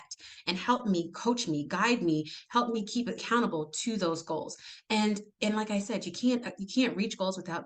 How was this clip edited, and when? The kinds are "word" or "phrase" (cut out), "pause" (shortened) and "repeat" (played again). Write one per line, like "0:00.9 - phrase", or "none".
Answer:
0:03.2 - word